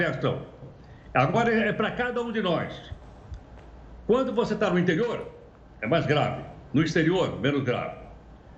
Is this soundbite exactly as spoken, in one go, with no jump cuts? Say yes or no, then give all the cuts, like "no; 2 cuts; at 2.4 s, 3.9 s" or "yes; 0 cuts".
yes; 0 cuts